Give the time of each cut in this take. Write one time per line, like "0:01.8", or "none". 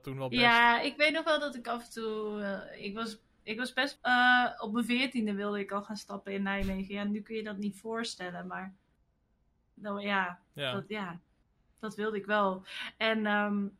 0:04.0